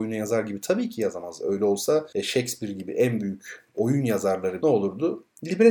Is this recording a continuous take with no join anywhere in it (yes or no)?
no